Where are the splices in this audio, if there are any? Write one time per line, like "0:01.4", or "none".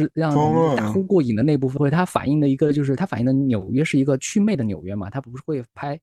0:01.8